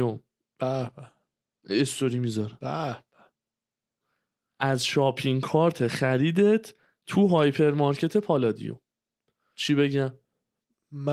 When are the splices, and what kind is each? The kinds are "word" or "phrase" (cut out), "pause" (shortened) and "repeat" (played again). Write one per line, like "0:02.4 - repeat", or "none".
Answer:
none